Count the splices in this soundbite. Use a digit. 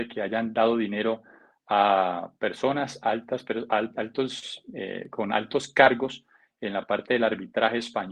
0